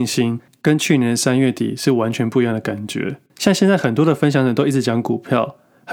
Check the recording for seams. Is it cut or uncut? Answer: cut